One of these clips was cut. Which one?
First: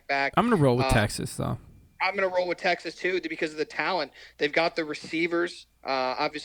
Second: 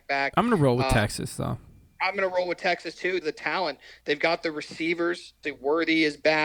second; 2 cuts; at 3.2 s, 5.4 s

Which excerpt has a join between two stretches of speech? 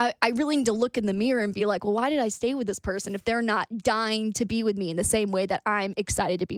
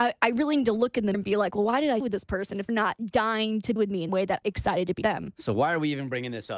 second; 7 cuts; at 1.1 s, 2.0 s, 2.7 s, 3.8 s, 4.1 s, 4.4 s, 5.0 s

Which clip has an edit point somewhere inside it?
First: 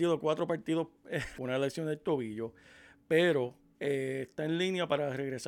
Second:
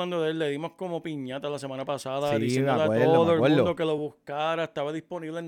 first; 1 cut; at 1.4 s

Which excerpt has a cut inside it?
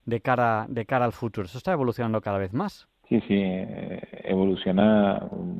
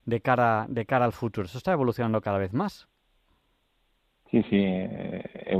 first; 1 cut; at 3.0 s

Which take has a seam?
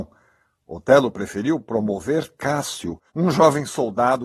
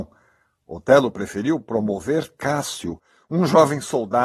first; 1 cut; at 3.1 s

